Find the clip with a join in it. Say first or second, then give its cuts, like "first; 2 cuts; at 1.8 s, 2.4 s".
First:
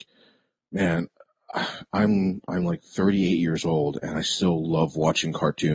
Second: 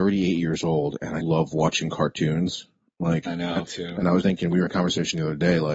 second; 5 cuts; at 1.2 s, 3.3 s, 3.6 s, 4.2 s, 4.7 s